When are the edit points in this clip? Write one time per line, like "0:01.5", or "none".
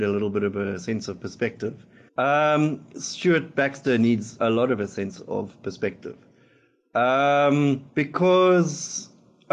0:02.1
0:04.4
0:07.9